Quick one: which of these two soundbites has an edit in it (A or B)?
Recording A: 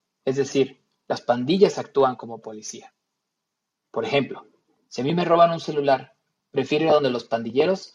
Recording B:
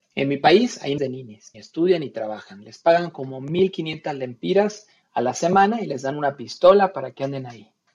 B